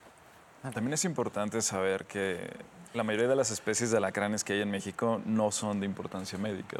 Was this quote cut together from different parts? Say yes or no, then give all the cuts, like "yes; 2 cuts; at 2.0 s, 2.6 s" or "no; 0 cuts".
no; 0 cuts